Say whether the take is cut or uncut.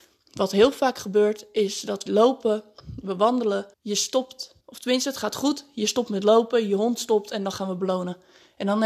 cut